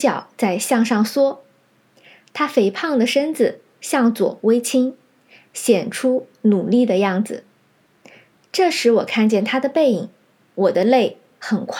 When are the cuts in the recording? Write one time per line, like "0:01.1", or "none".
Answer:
none